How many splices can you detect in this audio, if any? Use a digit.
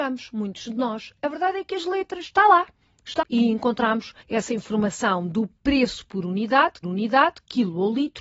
3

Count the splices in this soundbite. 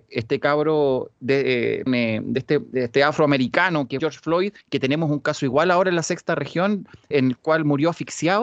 5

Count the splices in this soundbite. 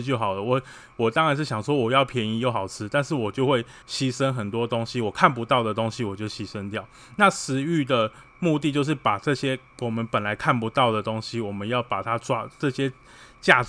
1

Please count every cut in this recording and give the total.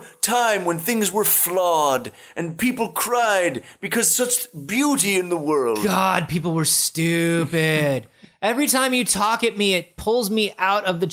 0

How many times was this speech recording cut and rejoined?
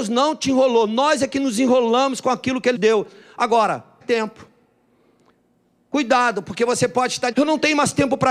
3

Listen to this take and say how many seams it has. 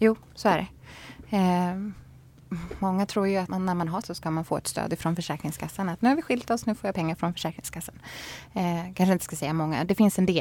2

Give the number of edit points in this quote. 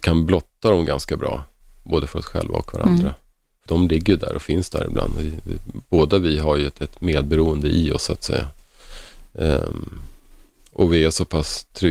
1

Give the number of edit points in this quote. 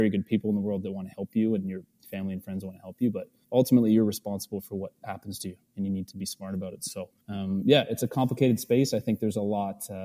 2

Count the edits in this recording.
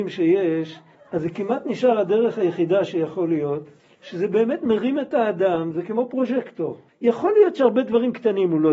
3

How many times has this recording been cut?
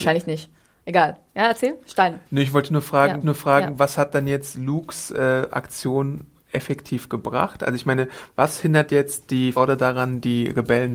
3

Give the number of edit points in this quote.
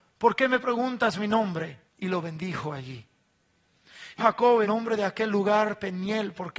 3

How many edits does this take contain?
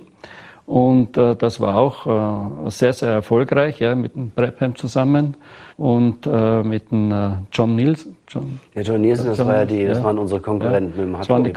2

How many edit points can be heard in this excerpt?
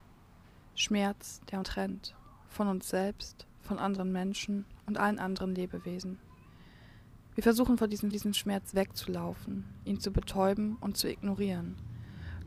2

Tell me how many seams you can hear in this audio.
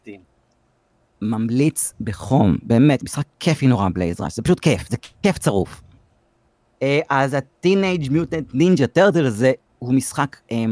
0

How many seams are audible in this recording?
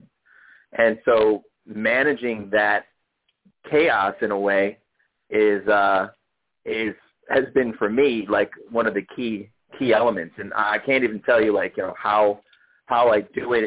0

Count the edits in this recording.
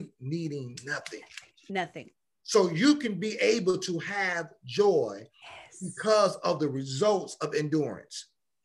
0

